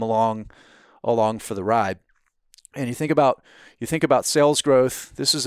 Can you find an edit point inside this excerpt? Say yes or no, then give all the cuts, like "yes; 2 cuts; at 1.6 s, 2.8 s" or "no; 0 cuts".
no; 0 cuts